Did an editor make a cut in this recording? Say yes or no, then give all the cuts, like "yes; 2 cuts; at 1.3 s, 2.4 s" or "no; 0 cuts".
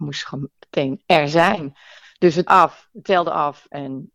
yes; 1 cut; at 2.5 s